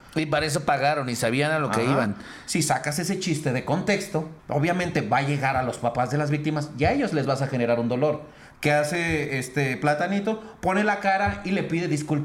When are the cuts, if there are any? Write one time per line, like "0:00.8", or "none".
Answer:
0:04.4